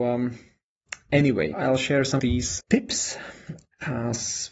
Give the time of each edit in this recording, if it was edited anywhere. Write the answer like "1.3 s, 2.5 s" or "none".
1.5 s, 2.2 s, 2.6 s